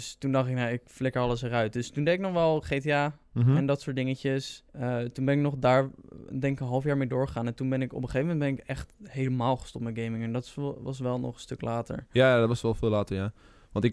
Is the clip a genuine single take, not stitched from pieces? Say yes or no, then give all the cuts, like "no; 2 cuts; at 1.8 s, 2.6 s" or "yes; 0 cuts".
no; 1 cut; at 4.7 s